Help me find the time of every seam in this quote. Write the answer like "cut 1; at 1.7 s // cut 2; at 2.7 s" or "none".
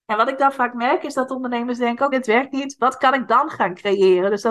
cut 1; at 2.1 s